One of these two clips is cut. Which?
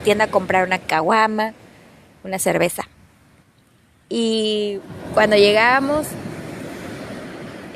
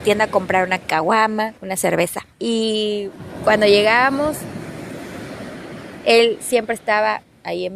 second; 2 cuts; at 1.6 s, 2.3 s

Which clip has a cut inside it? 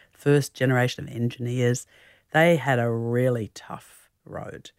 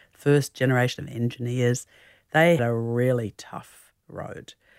second; 1 cut; at 2.6 s

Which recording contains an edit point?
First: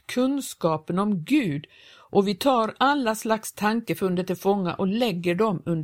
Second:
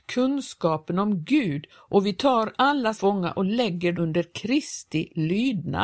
second; 3 cuts; at 1.7 s, 2.9 s, 3.9 s

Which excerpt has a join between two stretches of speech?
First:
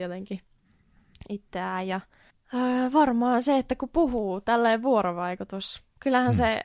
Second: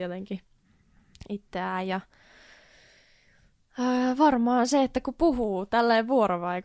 first; 1 cut; at 2.3 s

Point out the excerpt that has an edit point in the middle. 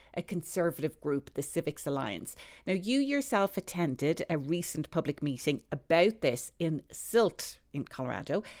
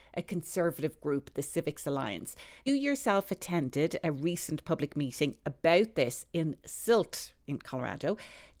second; 1 cut; at 2.7 s

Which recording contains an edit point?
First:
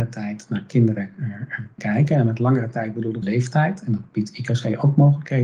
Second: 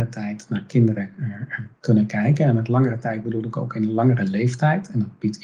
first; 2 cuts; at 1.8 s, 3.2 s

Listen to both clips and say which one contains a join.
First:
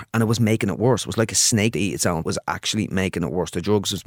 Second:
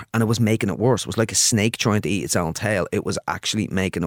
first; 2 cuts; at 1.7 s, 2.2 s

